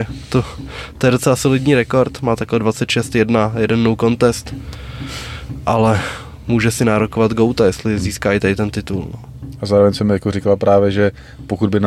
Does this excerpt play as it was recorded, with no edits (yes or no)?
yes